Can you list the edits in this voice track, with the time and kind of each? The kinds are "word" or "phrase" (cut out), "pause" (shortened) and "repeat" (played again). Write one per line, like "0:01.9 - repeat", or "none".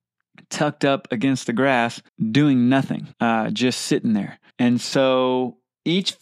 0:02.1 - pause
0:03.1 - pause
0:04.5 - pause